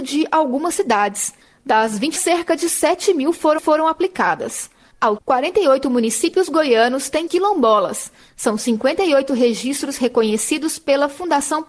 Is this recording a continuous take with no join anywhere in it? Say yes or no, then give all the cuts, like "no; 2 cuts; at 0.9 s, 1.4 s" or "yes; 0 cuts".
no; 4 cuts; at 2.2 s, 3.6 s, 5.2 s, 7.3 s